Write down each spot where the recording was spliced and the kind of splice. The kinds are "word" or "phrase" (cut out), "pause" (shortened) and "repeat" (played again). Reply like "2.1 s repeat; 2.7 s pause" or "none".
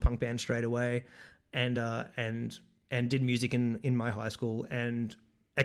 none